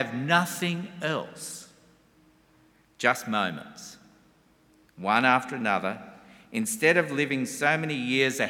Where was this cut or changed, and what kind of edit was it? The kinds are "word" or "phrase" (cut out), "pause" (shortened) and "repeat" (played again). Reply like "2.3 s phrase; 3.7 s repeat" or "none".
none